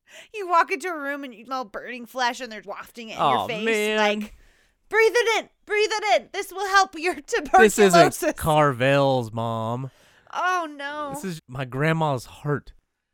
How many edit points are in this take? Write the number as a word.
three